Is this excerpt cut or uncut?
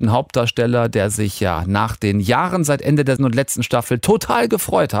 cut